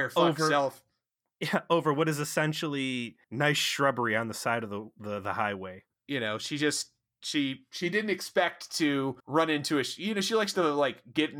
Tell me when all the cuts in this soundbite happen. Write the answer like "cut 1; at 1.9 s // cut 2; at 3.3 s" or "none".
cut 1; at 3.2 s // cut 2; at 5.9 s // cut 3; at 9.2 s